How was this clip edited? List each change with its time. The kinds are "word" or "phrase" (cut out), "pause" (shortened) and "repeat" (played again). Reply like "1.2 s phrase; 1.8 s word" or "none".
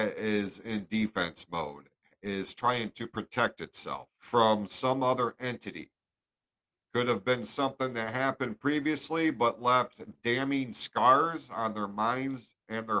4.1 s pause